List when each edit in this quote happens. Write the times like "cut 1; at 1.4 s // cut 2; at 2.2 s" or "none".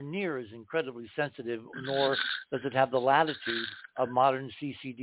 cut 1; at 3.9 s